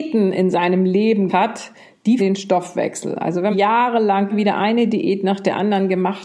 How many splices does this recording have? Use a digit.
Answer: 4